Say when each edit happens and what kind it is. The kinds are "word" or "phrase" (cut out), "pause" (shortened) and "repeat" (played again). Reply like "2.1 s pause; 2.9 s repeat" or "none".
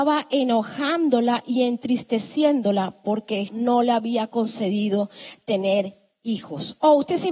3.5 s word